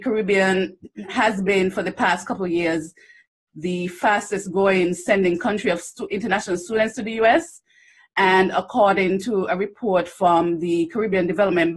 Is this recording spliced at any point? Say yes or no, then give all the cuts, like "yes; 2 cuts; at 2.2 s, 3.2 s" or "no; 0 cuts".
no; 0 cuts